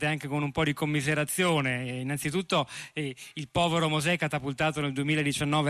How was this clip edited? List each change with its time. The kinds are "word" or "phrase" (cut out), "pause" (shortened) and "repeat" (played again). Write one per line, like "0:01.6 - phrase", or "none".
none